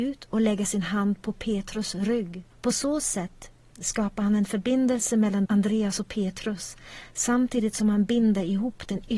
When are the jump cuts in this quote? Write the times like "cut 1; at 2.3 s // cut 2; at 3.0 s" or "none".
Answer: cut 1; at 2.5 s // cut 2; at 5.5 s